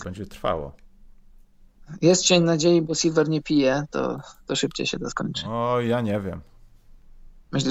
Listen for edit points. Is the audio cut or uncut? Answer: uncut